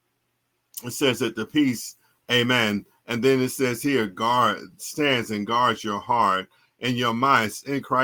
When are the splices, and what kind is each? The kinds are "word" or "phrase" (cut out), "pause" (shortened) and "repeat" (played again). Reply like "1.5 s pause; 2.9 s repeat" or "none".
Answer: none